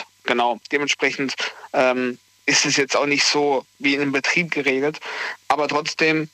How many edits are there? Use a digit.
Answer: 0